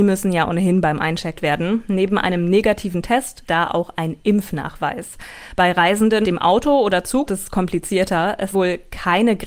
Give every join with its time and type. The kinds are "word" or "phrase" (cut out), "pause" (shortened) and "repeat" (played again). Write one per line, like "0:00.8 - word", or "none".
0:01.4 - word
0:03.5 - word
0:06.2 - word
0:07.3 - word
0:08.5 - word